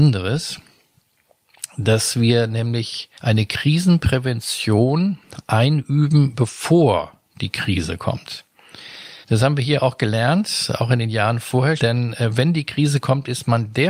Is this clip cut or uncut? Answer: cut